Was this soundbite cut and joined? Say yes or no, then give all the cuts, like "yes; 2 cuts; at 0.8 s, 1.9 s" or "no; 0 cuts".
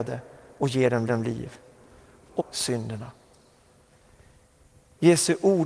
yes; 2 cuts; at 1.1 s, 2.4 s